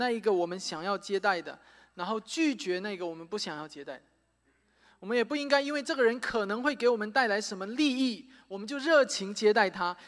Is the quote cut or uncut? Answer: uncut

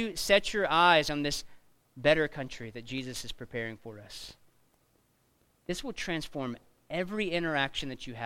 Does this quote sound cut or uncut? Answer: uncut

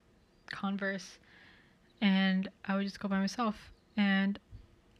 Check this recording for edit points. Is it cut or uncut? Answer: uncut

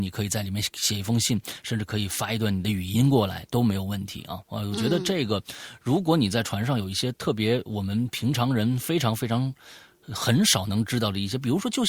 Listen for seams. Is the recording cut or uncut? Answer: uncut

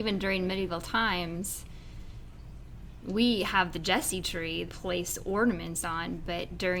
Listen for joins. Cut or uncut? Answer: cut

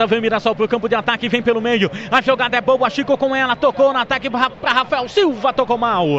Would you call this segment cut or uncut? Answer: uncut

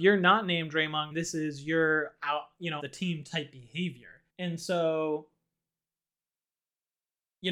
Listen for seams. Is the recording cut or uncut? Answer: cut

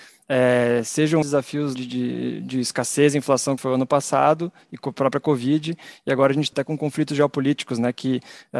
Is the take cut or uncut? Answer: cut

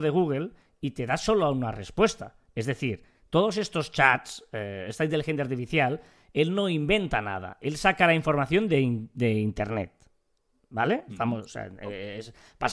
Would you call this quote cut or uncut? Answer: uncut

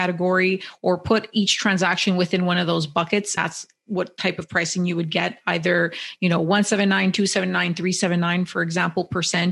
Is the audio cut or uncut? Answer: cut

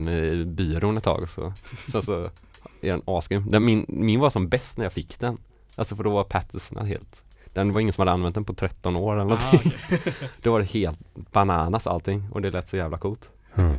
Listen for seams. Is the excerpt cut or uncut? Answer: uncut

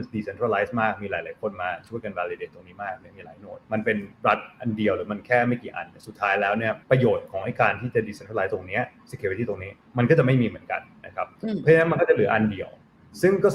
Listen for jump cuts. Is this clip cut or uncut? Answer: cut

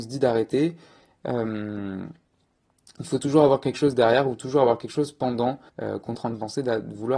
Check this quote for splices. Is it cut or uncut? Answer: cut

